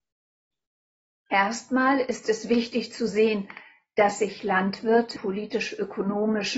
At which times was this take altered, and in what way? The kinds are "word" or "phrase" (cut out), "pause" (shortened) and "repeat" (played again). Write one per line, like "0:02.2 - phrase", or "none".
0:05.2 - word